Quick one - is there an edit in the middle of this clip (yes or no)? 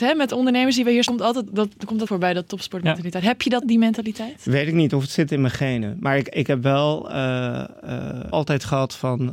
yes